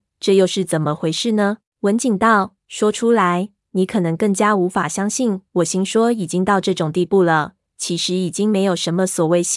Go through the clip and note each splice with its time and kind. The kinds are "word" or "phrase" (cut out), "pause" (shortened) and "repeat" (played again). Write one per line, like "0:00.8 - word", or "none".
0:01.7 - pause